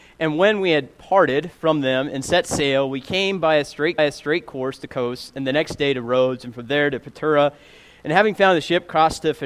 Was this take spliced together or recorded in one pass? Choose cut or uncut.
cut